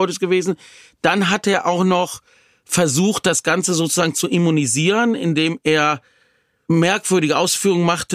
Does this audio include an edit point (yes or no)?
no